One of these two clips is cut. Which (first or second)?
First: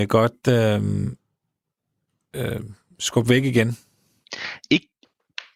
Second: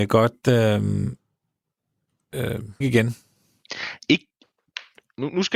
second